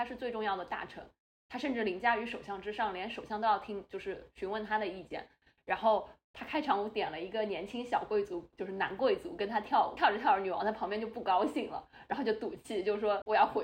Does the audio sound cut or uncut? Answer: uncut